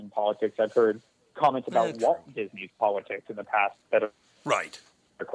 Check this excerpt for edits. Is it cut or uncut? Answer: uncut